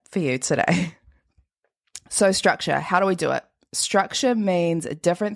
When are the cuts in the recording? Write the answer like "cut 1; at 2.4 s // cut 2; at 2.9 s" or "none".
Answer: none